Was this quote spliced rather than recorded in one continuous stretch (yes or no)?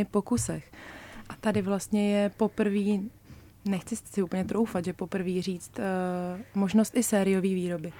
no